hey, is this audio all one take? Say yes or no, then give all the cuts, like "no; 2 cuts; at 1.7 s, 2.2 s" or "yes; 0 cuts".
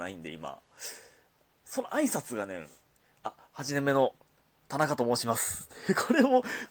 yes; 0 cuts